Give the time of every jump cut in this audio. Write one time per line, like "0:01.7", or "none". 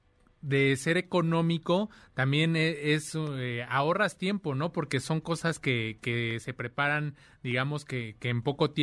none